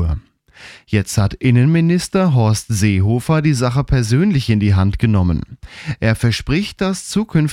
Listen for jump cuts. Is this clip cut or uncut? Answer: uncut